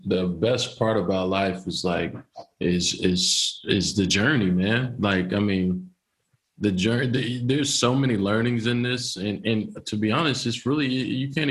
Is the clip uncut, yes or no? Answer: yes